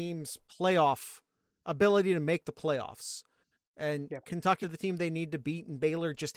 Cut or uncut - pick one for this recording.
cut